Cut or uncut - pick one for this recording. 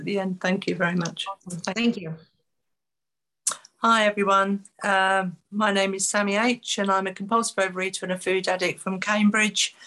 uncut